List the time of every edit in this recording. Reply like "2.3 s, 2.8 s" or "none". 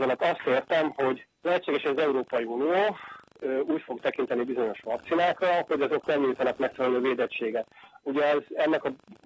1.3 s